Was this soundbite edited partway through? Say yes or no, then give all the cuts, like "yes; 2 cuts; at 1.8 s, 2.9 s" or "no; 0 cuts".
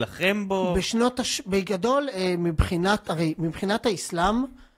no; 0 cuts